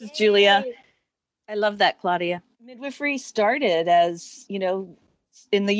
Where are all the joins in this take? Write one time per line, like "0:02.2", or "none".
0:02.5